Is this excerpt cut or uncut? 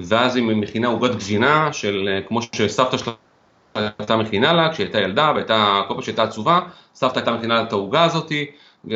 uncut